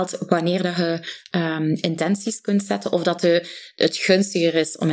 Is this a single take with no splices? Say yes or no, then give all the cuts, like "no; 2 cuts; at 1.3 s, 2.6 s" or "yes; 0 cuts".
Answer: yes; 0 cuts